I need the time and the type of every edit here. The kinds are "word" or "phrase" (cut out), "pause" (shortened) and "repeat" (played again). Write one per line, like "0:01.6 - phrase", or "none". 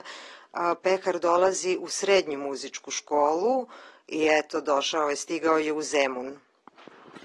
none

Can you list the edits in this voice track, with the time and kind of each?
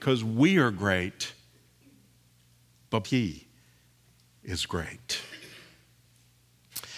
0:03.0 - word

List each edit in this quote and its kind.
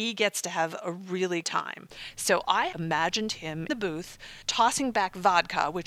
0:01.4 - word
0:02.7 - word
0:03.7 - word
0:04.4 - pause

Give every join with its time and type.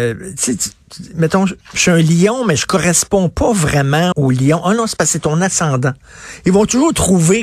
0:01.6 - word
0:04.1 - word

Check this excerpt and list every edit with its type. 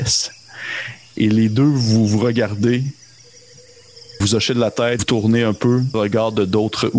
0:04.2 - word
0:05.0 - word
0:05.9 - phrase

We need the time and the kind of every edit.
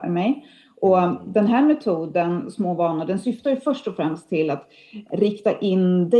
none

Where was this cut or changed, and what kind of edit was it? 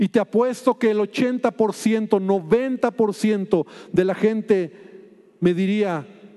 none

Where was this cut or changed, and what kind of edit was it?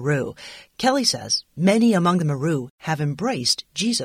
none

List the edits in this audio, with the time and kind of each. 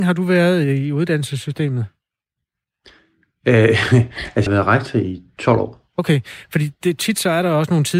0:04.5 - word

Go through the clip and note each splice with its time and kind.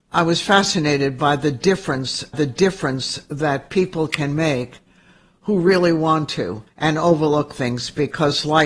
0:02.3 - repeat
0:06.7 - pause

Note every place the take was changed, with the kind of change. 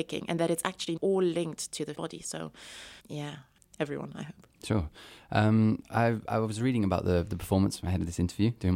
0:01.0 - word
0:01.9 - word
0:03.0 - pause
0:03.6 - phrase

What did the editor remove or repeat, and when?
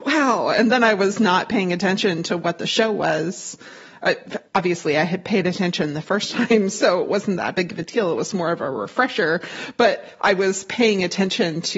0:04.5 - pause

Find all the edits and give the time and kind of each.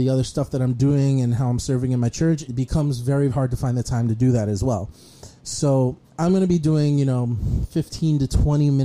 0:02.5 - word
0:03.3 - word
0:06.1 - pause

